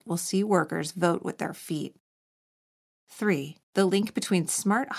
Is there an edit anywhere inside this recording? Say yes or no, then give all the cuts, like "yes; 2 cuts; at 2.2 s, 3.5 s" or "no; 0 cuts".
yes; 1 cut; at 3.6 s